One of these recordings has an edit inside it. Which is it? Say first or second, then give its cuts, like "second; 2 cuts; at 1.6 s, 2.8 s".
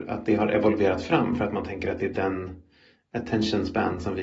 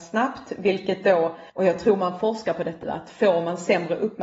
second; 2 cuts; at 1.5 s, 2.8 s